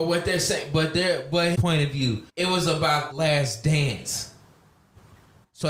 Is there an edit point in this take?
yes; 3 cuts; at 1.5 s, 2.3 s, 3.1 s

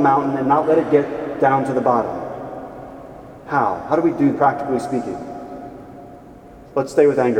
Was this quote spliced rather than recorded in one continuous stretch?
yes; 1 cut; at 4.3 s

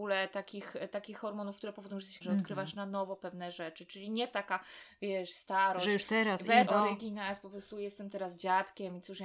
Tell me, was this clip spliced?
yes; 2 cuts; at 2.2 s, 6.7 s

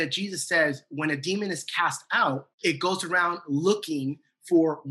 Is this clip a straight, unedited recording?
no; 1 cut; at 2.6 s

